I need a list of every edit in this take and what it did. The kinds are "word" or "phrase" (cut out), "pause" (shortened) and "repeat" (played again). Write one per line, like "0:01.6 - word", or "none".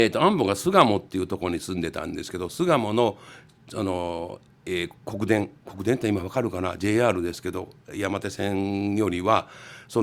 0:04.6 - pause